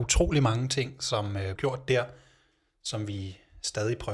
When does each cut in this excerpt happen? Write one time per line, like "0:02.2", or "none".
0:01.6